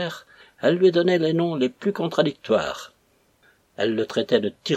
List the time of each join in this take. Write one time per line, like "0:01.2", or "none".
none